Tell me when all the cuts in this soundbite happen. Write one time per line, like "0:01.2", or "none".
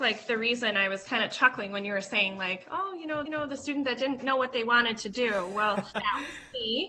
0:03.3
0:04.2
0:05.9

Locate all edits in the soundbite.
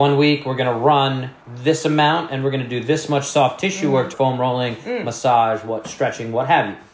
0:01.4
0:04.1

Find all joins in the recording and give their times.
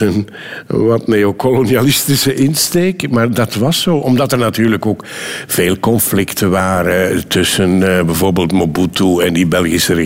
none

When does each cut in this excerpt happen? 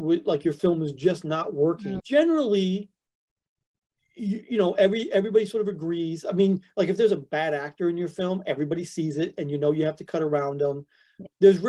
none

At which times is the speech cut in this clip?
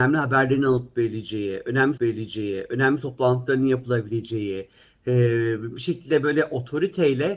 0:02.0

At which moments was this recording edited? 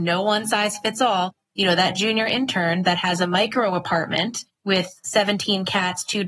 0:04.5

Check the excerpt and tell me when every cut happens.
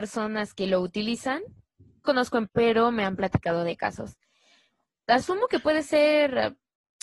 0:02.0
0:02.5

